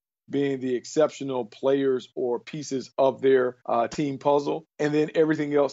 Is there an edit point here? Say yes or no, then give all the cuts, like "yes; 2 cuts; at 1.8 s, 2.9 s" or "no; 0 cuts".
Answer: yes; 2 cuts; at 3.6 s, 4.7 s